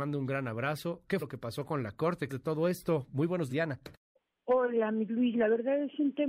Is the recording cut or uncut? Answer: cut